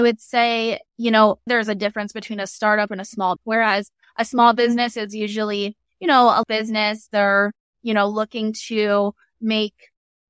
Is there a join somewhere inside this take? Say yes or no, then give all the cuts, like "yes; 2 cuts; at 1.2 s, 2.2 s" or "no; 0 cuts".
yes; 3 cuts; at 1.5 s, 3.4 s, 6.4 s